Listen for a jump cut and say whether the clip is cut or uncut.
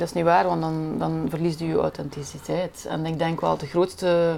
uncut